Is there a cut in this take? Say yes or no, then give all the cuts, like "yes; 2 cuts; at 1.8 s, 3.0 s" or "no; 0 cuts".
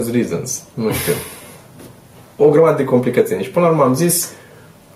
no; 0 cuts